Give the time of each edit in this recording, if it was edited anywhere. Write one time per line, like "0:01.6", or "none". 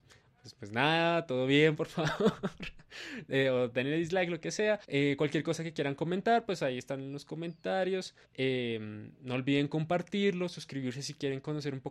0:04.8
0:08.2